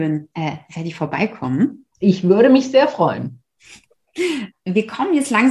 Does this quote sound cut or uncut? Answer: uncut